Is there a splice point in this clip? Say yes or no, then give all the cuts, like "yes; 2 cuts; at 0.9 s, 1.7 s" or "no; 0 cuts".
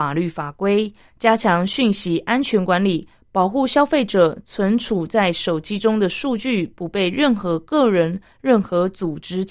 no; 0 cuts